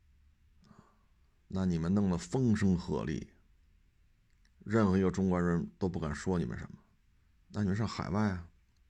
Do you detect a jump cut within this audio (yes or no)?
no